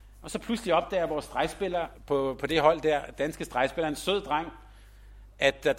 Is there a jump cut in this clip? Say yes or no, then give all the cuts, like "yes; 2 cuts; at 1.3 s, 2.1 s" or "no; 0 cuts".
yes; 1 cut; at 2.0 s